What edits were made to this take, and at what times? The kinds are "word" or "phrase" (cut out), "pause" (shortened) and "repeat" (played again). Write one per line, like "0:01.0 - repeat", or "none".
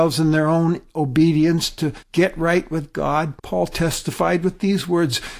0:02.0 - pause
0:03.4 - pause